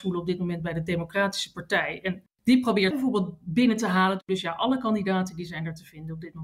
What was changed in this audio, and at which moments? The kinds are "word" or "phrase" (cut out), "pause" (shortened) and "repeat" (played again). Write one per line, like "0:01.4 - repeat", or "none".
0:02.3 - pause
0:02.9 - word